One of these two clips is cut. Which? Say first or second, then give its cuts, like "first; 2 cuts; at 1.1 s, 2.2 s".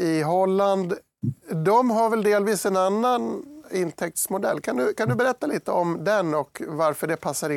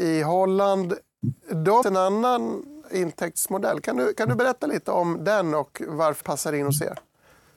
second; 2 cuts; at 1.8 s, 6.2 s